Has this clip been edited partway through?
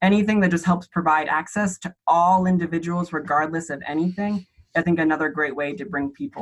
yes; 1 cut; at 4.8 s

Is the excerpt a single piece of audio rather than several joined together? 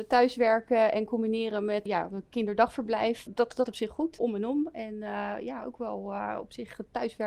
no; 4 cuts; at 1.9 s, 3.3 s, 3.7 s, 4.2 s

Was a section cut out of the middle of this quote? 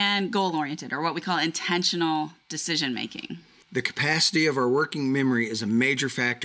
no; 0 cuts

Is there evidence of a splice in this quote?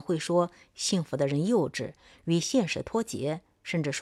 no; 0 cuts

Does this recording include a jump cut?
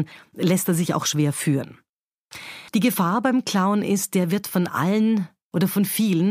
yes; 1 cut; at 2.7 s

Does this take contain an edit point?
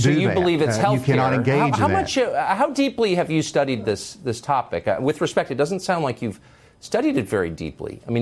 no; 0 cuts

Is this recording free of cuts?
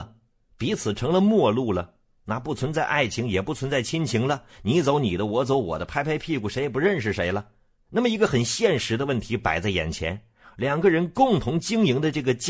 yes; 0 cuts

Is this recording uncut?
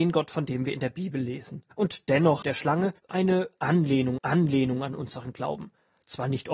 no; 4 cuts; at 1.7 s, 2.4 s, 3.0 s, 4.2 s

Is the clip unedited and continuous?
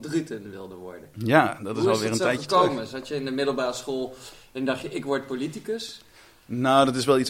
yes; 0 cuts

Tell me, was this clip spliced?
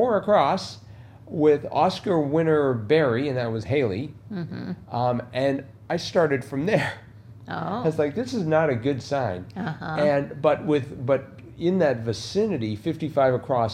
no; 0 cuts

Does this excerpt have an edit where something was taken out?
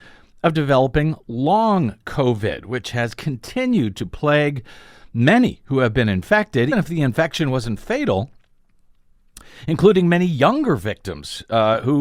yes; 1 cut; at 6.7 s

